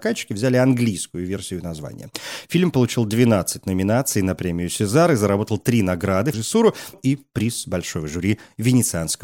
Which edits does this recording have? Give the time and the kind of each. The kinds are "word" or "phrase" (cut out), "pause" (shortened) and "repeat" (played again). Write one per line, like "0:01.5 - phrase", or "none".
0:06.3 - phrase
0:06.9 - word